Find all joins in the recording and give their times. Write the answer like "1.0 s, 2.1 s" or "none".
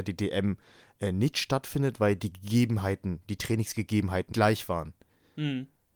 4.3 s